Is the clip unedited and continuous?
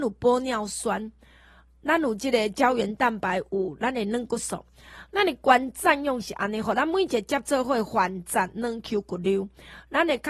yes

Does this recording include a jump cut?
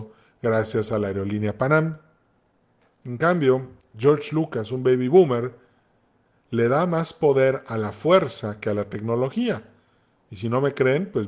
no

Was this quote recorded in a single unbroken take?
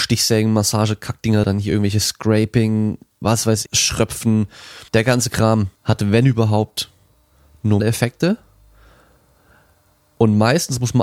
no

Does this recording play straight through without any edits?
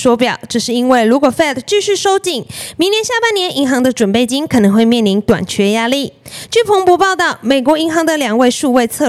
yes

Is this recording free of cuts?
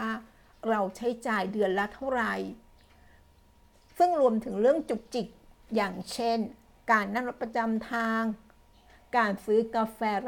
yes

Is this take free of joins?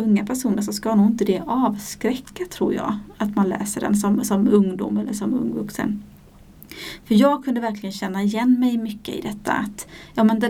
yes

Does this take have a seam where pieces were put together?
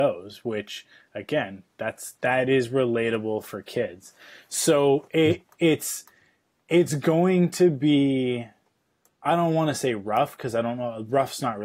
no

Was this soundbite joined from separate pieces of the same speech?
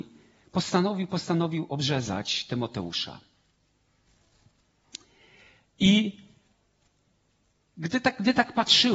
no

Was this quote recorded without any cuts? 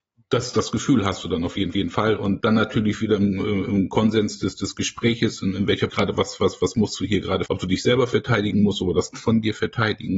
no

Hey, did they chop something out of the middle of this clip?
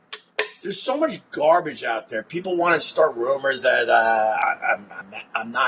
no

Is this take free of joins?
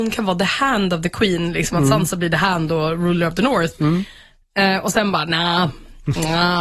yes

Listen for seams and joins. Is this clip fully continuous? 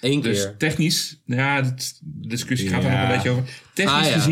no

